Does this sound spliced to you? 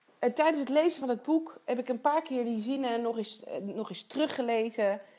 no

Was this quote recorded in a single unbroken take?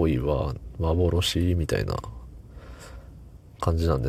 yes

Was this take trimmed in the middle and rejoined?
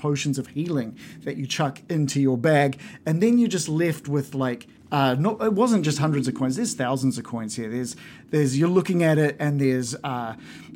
yes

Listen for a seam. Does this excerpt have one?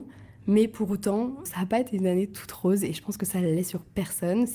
yes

